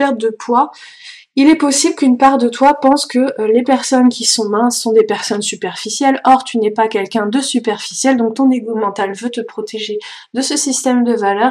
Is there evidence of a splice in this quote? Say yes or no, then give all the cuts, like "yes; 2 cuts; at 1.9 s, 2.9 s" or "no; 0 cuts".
no; 0 cuts